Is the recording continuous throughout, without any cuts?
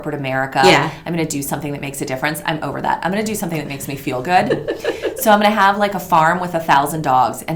yes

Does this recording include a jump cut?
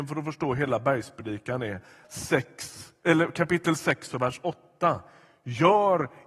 yes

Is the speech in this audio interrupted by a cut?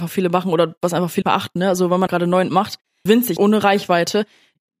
yes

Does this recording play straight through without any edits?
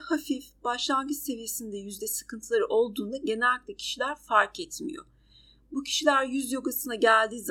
yes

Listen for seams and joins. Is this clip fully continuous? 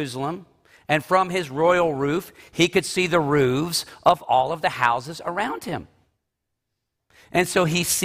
yes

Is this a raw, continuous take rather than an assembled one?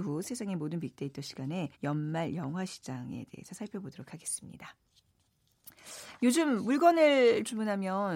no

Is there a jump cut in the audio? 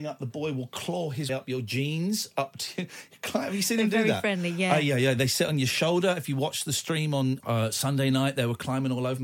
yes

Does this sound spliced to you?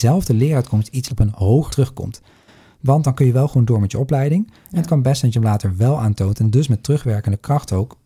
yes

